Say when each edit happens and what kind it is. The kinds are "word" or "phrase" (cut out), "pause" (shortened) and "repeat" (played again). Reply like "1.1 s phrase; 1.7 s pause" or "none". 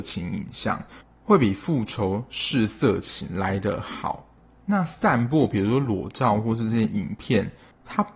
none

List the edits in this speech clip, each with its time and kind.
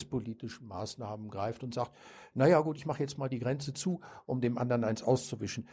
none

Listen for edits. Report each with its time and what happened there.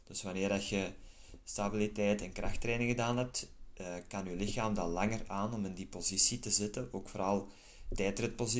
none

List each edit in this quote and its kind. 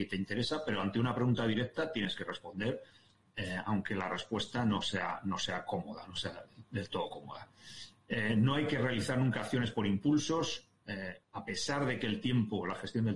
11.2 s pause

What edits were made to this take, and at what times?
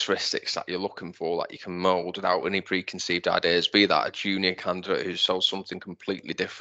none

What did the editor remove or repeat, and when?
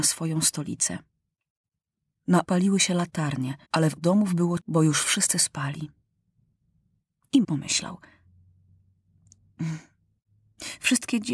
2.4 s word; 3.6 s pause; 4.0 s word; 4.6 s word; 7.4 s word

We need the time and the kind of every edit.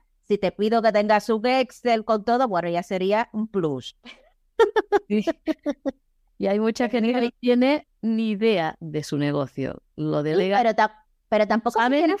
none

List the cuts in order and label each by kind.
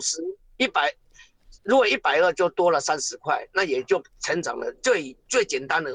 1.5 s pause; 4.1 s pause

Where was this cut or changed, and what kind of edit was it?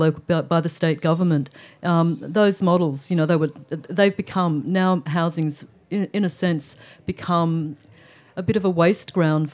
none

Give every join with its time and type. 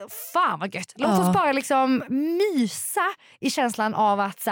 none

